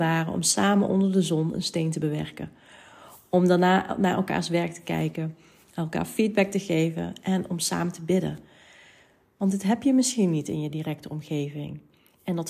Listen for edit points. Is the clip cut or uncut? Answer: uncut